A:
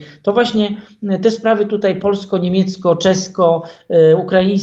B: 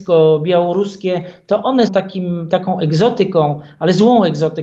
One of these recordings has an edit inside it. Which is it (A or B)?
B